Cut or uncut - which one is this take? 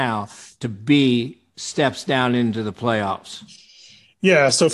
uncut